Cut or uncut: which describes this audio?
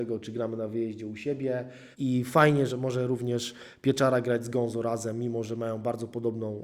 cut